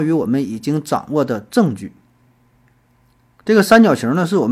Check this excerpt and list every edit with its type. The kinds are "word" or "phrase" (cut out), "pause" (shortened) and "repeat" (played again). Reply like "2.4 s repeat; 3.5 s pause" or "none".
none